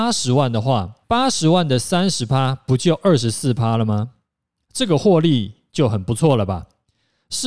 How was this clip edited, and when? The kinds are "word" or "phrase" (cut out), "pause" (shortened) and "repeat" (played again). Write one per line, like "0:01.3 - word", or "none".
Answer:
0:01.0 - pause
0:04.3 - pause